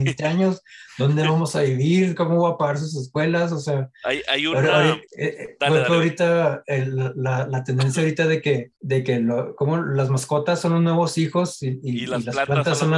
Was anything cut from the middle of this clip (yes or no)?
yes